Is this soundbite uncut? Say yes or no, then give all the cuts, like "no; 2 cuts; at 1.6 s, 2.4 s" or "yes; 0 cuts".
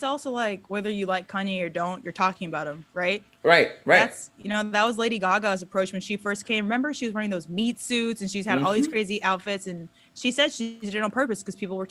yes; 0 cuts